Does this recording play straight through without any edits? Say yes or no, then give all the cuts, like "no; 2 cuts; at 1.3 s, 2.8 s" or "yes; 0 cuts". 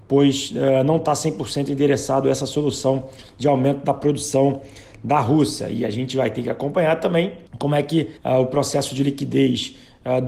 no; 2 cuts; at 7.5 s, 8.2 s